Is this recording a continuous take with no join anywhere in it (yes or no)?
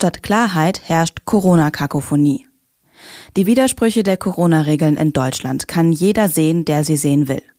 yes